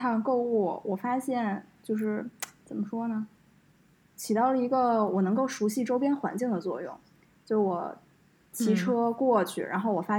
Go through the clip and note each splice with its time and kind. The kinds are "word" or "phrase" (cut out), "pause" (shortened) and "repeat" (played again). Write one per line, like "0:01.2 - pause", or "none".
none